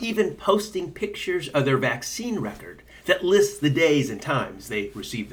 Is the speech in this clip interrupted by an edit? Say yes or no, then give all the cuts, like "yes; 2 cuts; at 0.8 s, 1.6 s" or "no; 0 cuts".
no; 0 cuts